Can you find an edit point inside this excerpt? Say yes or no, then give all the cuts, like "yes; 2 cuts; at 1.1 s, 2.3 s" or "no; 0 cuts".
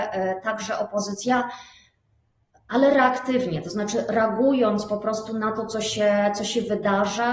no; 0 cuts